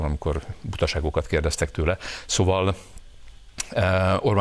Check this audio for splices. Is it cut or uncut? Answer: uncut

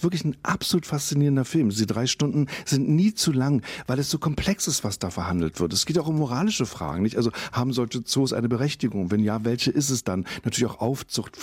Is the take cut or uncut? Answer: uncut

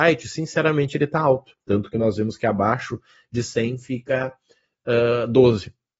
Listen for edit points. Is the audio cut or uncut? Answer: uncut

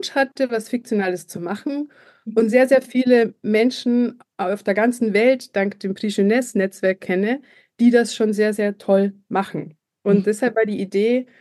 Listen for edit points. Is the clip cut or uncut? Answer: uncut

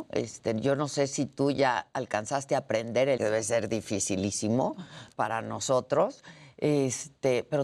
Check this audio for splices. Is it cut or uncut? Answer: cut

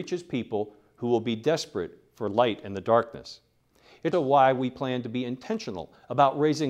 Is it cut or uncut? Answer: cut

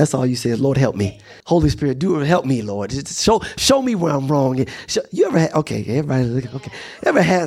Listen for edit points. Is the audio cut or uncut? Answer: cut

